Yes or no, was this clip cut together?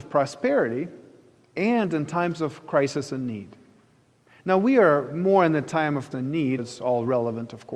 yes